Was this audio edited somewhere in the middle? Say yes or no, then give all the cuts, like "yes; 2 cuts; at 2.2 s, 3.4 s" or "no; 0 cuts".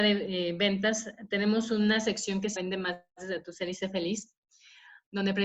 yes; 1 cut; at 2.6 s